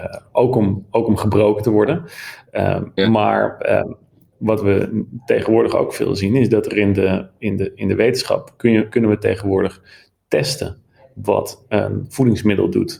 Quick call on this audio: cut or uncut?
uncut